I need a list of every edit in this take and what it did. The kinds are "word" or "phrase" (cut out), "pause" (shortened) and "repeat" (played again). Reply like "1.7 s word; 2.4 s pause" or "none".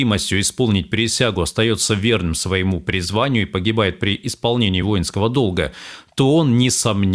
none